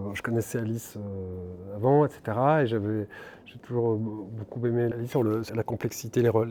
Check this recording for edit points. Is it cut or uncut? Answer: cut